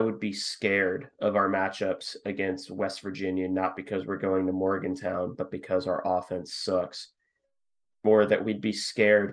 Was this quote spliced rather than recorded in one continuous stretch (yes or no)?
no